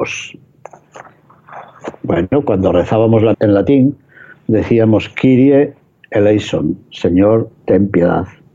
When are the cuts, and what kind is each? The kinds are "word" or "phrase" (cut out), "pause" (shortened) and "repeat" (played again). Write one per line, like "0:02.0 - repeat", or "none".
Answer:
0:03.3 - word

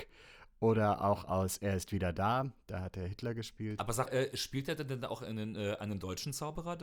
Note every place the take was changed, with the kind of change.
0:04.1 - word

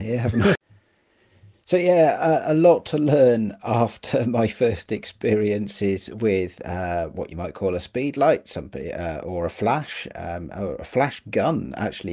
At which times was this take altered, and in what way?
none

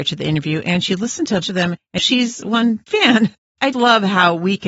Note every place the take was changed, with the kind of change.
0:01.4 - word
0:02.0 - word
0:02.9 - word
0:03.7 - word

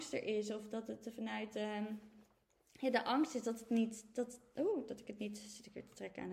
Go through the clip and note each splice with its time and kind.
none

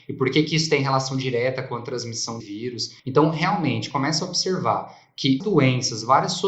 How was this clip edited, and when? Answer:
0:02.4 - word
0:03.0 - pause
0:03.9 - phrase
0:05.4 - word

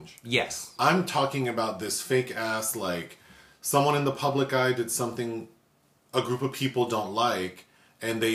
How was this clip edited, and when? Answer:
none

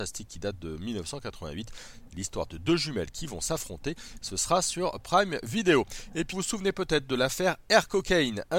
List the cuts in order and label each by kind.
0:06.3 - word

